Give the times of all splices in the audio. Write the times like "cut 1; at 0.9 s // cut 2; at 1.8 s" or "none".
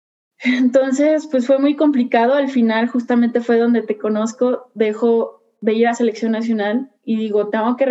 cut 1; at 7.0 s